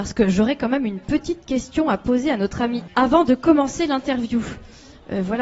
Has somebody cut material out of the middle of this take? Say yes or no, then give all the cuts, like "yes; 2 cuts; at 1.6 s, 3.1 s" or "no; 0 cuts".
yes; 1 cut; at 2.9 s